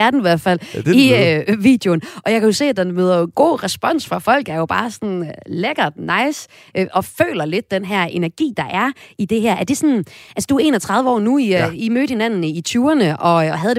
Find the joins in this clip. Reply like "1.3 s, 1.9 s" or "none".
none